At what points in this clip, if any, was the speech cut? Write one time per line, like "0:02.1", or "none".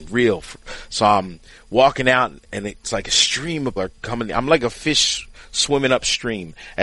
0:03.8

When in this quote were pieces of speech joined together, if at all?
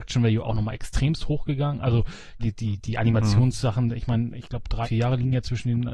0:02.4
0:04.8

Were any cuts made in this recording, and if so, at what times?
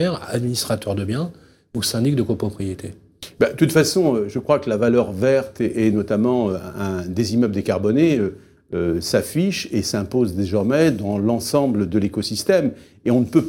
none

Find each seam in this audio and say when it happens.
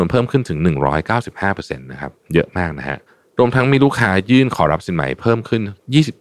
0:03.1

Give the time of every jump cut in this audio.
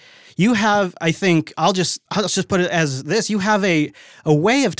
0:02.1

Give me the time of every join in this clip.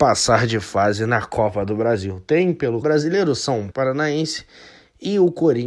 0:02.8
0:03.7

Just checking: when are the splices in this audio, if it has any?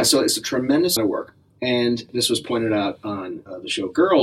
0:01.0

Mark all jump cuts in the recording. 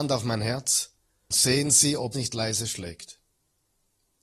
0:01.3
0:02.1

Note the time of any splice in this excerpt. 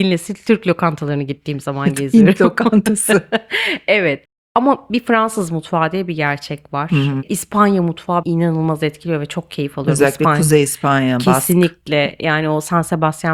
0:08.2

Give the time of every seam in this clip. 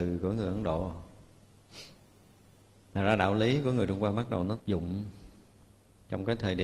0:04.6

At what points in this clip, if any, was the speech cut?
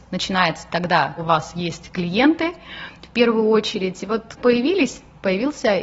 0:01.2
0:04.4

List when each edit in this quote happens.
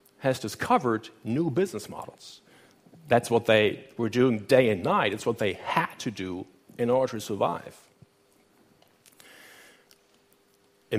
none

